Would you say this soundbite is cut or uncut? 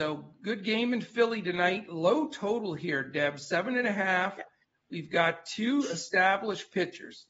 uncut